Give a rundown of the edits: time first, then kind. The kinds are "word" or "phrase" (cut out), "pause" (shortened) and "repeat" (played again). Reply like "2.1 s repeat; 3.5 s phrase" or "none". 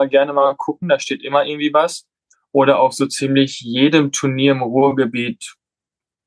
2.3 s pause